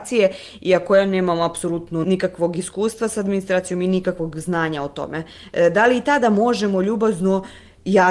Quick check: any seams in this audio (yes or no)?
no